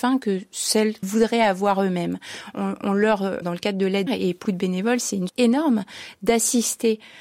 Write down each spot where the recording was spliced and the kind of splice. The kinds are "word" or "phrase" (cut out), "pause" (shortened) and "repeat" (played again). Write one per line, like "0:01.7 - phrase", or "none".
0:01.0 - word
0:03.4 - word
0:04.1 - word
0:04.4 - word
0:05.3 - word